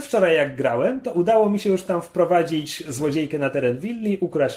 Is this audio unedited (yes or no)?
yes